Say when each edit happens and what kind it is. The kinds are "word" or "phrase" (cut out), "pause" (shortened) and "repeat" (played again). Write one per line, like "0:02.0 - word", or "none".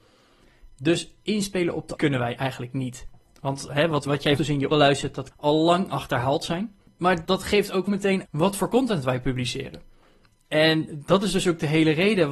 0:02.0 - word
0:03.7 - word
0:04.1 - word
0:04.4 - word
0:04.7 - word
0:05.3 - word
0:07.3 - word
0:07.9 - word
0:08.3 - word